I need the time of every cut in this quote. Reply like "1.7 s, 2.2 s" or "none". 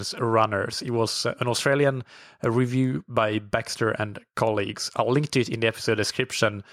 none